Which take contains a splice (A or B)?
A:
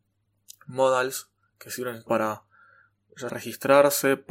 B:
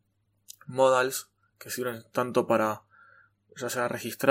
A